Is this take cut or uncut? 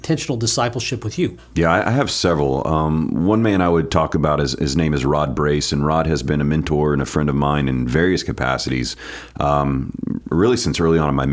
uncut